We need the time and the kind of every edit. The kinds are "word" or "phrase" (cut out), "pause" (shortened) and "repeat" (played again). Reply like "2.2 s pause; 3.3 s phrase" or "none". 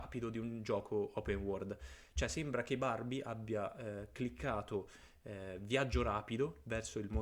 none